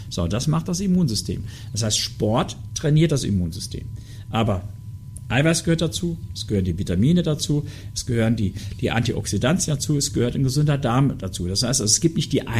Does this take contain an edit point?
no; 0 cuts

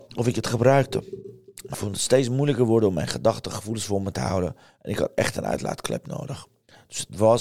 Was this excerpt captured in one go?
no; 1 cut; at 1.7 s

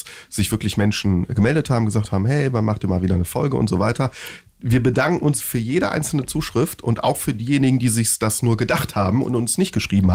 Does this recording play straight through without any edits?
no; 1 cut; at 5.4 s

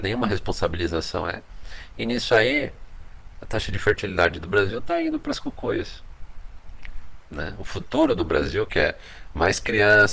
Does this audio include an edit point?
no; 0 cuts

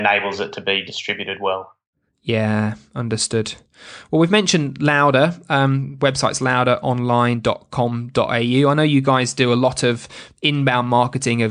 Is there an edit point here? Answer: no; 0 cuts

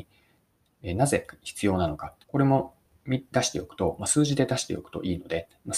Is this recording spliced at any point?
yes; 1 cut; at 2.2 s

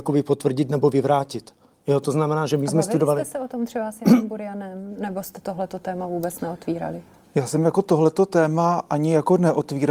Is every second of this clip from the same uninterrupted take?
yes; 0 cuts

